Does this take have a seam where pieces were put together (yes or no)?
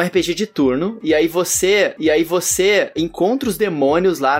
yes